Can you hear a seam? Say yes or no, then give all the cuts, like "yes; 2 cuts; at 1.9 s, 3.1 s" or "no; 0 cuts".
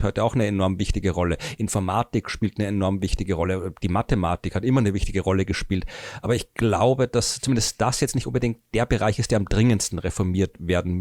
no; 0 cuts